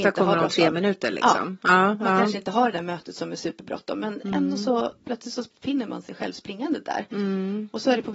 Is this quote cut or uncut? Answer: uncut